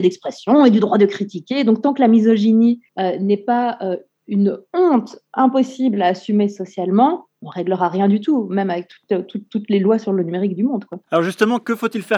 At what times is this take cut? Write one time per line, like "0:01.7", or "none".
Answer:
0:02.9
0:11.0